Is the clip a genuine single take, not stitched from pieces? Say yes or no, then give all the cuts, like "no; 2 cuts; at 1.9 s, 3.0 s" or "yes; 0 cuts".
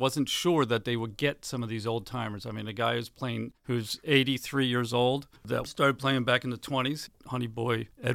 no; 1 cut; at 5.4 s